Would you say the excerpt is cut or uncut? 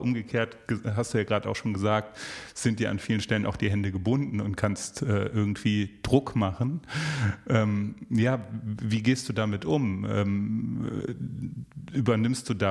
uncut